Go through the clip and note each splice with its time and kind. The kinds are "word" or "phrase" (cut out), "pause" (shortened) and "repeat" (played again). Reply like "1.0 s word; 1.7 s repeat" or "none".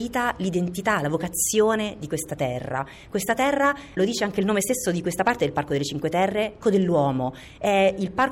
4.0 s word; 6.6 s word